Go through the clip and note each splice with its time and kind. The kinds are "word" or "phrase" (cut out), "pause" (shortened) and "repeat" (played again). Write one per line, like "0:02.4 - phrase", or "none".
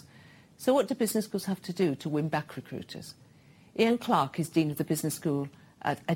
none